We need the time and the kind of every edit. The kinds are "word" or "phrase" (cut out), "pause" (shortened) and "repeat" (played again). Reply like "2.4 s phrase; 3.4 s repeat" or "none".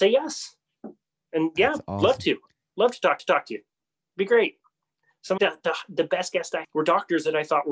3.2 s repeat; 5.4 s word; 6.6 s word